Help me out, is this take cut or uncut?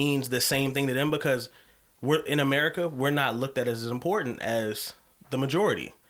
uncut